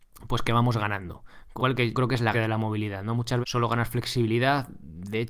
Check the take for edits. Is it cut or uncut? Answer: cut